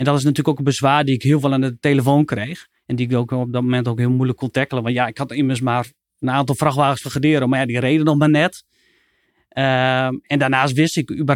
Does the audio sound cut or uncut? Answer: uncut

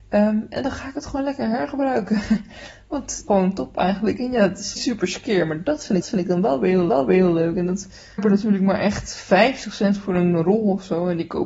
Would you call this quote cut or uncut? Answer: cut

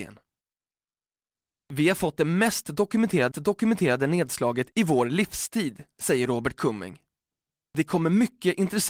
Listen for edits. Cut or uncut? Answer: cut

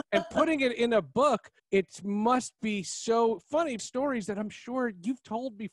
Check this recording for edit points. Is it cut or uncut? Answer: cut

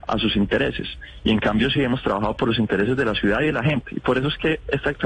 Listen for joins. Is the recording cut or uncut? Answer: uncut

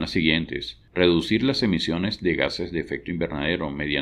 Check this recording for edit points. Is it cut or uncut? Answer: uncut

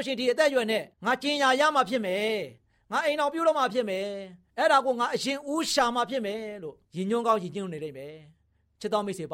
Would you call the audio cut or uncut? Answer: cut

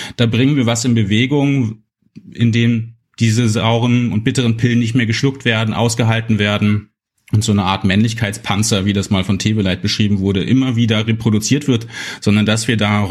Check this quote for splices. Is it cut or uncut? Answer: uncut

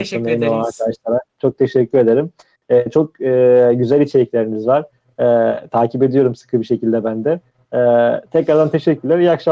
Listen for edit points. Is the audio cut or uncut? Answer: uncut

